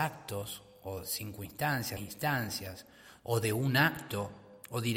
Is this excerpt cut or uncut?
cut